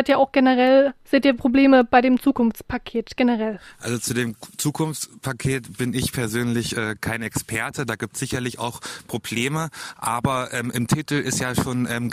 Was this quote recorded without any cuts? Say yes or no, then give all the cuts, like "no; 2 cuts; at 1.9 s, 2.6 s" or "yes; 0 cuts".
yes; 0 cuts